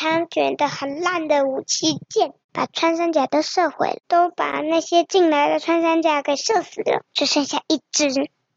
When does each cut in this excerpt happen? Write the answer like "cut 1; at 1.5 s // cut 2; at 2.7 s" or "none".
cut 1; at 2.4 s // cut 2; at 4.0 s // cut 3; at 7.1 s